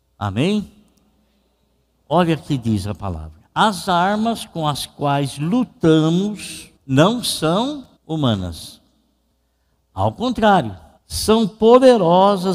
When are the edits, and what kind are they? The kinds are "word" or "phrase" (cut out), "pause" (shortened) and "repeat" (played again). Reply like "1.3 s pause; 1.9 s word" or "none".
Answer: 3.5 s pause; 6.8 s pause; 8.0 s pause; 11.0 s pause